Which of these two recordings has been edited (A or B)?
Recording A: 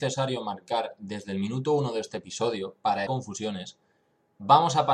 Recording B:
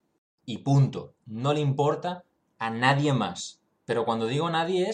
A